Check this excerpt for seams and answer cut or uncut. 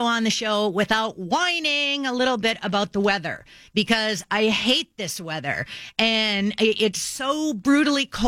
uncut